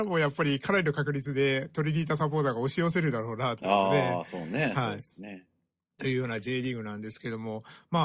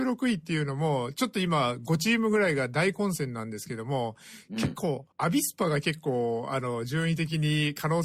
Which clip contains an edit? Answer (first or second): second